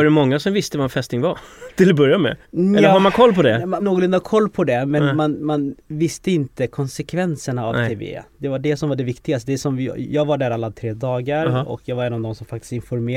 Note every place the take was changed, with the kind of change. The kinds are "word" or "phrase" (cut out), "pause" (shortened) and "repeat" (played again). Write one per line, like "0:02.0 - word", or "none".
0:02.4 - pause
0:03.8 - phrase